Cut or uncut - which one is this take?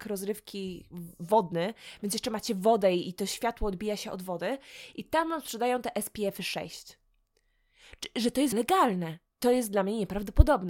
cut